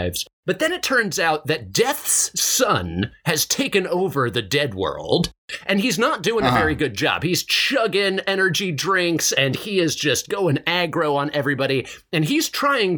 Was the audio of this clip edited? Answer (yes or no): no